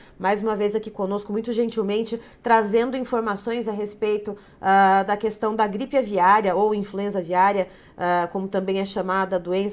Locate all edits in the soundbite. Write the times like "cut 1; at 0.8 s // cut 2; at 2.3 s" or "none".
none